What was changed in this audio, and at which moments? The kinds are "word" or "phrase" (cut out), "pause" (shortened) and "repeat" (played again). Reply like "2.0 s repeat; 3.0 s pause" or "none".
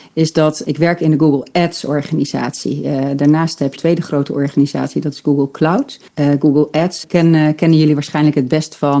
3.8 s phrase; 6.1 s pause; 7.0 s word